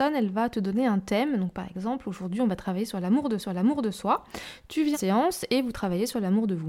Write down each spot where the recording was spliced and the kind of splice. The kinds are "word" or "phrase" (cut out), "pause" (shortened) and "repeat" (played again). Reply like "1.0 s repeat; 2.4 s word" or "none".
3.4 s repeat; 4.9 s word